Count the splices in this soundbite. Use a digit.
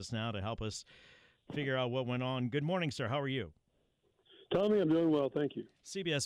0